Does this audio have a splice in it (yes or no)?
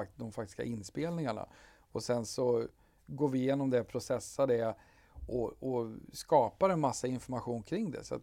no